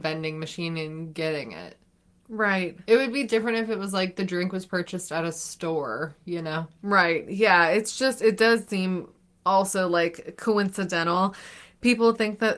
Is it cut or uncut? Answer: uncut